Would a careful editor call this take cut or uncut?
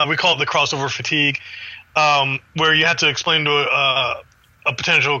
uncut